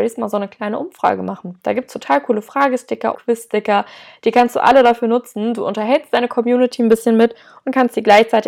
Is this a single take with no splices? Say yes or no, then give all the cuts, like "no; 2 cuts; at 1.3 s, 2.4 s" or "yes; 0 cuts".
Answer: no; 1 cut; at 3.1 s